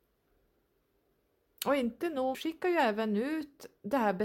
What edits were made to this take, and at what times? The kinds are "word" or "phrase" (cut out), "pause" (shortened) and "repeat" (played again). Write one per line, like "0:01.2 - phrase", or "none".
0:02.3 - phrase